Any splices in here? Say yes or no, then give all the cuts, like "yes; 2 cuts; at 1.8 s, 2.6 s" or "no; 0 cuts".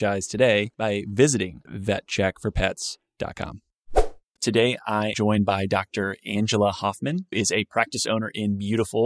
yes; 3 cuts; at 1.7 s, 5.1 s, 7.3 s